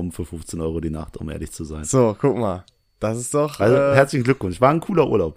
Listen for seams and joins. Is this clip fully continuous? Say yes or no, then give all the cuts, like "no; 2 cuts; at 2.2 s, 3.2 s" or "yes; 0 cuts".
yes; 0 cuts